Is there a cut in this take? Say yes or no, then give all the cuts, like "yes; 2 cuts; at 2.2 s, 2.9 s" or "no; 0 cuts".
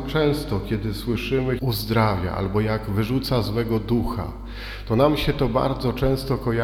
yes; 1 cut; at 1.6 s